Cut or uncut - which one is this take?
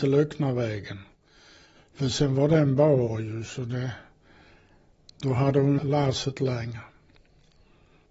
cut